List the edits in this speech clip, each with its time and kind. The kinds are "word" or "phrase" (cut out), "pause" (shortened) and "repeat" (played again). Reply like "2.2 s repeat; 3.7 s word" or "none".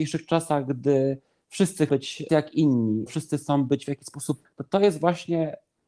1.9 s word; 2.3 s word; 3.1 s word; 4.4 s word

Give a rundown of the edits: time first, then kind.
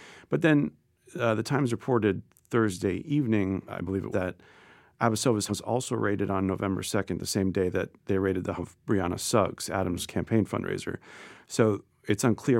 4.1 s word; 5.5 s word; 8.6 s word

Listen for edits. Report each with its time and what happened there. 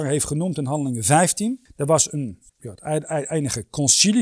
2.5 s pause

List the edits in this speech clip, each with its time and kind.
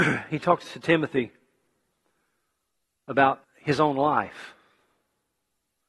3.4 s pause

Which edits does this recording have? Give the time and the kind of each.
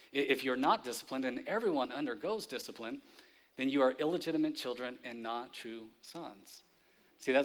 none

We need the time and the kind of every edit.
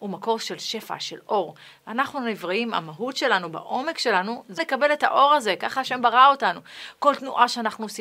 4.6 s word

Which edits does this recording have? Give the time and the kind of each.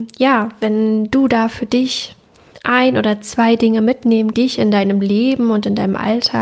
4.3 s phrase

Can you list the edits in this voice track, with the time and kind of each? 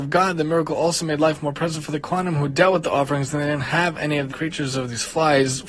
4.3 s word

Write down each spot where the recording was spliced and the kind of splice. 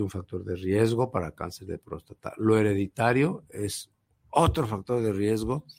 none

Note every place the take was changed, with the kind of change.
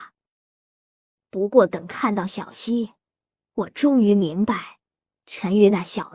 none

